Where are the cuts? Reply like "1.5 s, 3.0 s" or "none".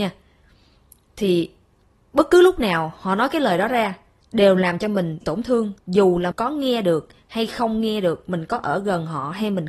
4.2 s, 5.2 s, 5.8 s, 6.3 s

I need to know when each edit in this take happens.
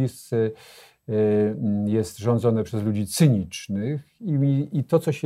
none

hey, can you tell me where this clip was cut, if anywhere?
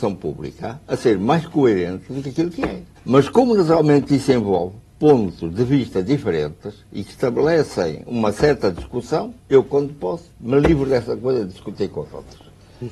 3.0 s, 9.4 s, 10.3 s

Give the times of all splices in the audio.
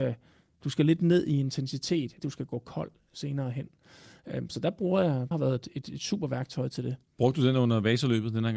2.2 s, 5.3 s

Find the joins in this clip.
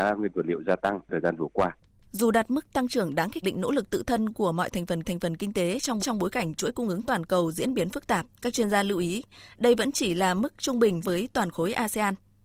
3.4 s, 5.0 s, 6.0 s, 8.3 s, 11.0 s

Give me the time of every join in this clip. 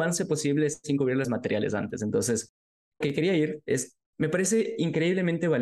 1.2 s, 3.0 s, 4.1 s

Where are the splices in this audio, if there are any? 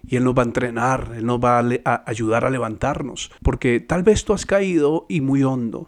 3.4 s

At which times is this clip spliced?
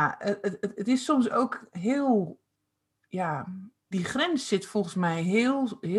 3.9 s

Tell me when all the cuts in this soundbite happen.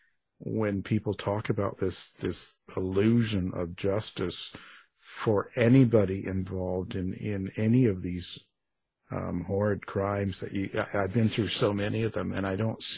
none

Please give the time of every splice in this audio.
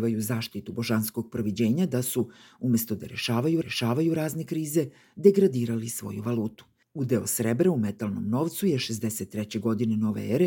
3.6 s

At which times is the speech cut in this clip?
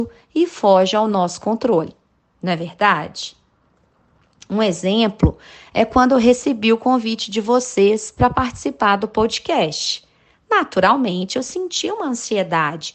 none

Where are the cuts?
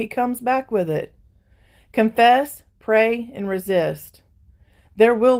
none

